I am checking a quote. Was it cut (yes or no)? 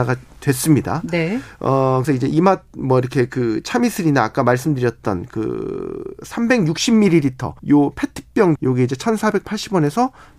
yes